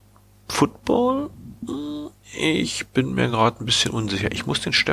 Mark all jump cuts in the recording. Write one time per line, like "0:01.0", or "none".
none